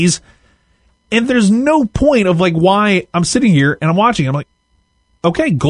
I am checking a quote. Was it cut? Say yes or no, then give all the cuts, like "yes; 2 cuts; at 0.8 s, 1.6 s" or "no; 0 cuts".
no; 0 cuts